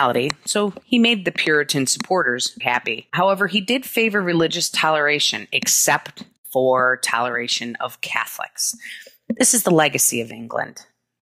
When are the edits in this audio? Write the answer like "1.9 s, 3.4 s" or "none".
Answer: 2.6 s